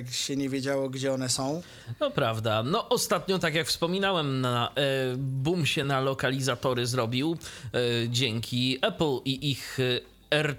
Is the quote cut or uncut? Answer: uncut